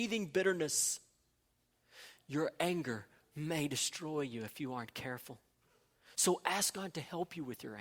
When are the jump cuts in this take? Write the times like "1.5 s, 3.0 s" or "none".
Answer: none